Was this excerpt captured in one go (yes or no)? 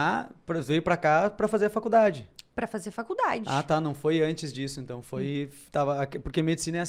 yes